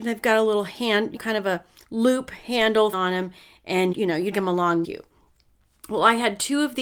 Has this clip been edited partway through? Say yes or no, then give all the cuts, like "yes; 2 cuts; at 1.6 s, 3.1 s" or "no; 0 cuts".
yes; 5 cuts; at 1.2 s, 2.9 s, 3.9 s, 4.3 s, 4.8 s